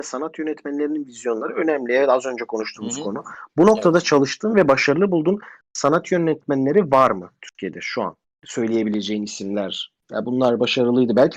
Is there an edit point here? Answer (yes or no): yes